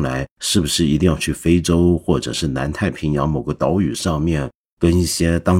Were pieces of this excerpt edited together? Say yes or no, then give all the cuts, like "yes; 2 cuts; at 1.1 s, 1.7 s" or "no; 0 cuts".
no; 0 cuts